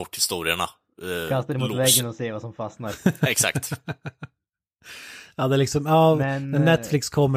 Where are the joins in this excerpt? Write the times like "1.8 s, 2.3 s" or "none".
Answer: none